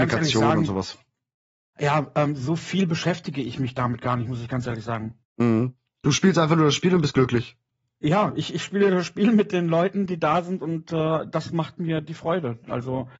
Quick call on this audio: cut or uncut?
cut